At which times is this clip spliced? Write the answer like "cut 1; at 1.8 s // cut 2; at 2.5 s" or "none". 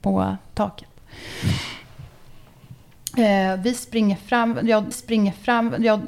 cut 1; at 4.9 s